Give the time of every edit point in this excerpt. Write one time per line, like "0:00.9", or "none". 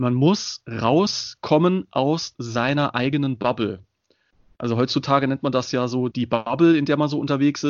0:06.1